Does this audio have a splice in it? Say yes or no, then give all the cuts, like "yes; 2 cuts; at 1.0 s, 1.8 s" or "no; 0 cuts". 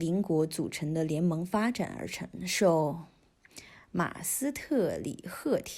no; 0 cuts